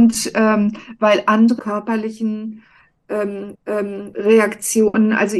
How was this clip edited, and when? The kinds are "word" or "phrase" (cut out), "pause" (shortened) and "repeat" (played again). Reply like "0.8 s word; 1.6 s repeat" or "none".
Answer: 1.6 s phrase; 3.5 s repeat